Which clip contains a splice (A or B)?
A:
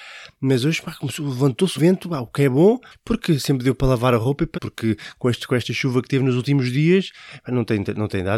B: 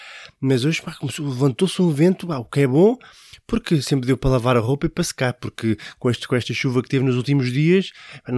A